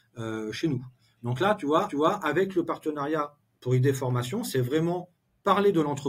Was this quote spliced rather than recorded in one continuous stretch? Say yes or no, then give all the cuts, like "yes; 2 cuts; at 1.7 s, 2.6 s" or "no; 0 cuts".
yes; 1 cut; at 1.9 s